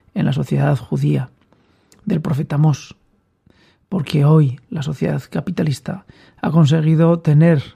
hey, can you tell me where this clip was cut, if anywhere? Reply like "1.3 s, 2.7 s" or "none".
none